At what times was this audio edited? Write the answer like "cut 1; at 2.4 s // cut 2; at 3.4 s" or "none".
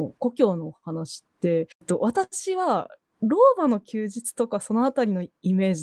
cut 1; at 1.7 s